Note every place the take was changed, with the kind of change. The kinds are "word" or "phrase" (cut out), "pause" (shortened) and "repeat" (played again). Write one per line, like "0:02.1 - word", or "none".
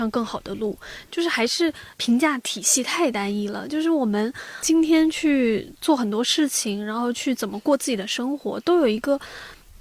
0:01.9 - pause